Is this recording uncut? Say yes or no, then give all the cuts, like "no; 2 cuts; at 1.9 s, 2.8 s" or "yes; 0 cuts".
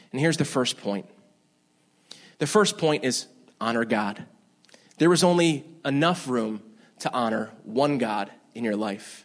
yes; 0 cuts